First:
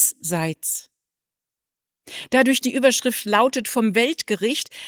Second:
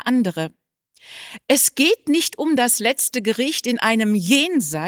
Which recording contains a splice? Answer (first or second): first